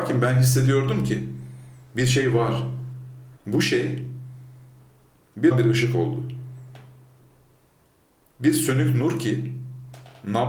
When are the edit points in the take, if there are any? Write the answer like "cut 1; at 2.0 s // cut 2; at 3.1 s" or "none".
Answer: cut 1; at 3.4 s // cut 2; at 5.5 s